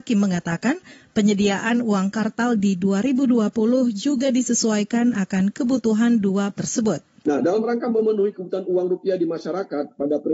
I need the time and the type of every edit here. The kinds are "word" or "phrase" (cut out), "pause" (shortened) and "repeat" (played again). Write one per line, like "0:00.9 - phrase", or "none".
0:06.6 - word